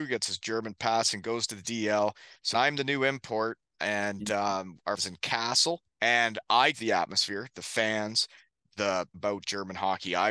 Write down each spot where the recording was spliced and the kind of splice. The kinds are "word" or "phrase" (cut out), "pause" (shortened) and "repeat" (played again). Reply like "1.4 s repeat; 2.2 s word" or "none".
2.5 s word; 5.0 s phrase; 5.9 s pause; 6.7 s phrase; 9.1 s word